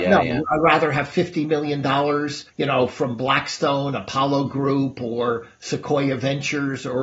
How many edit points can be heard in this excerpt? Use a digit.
1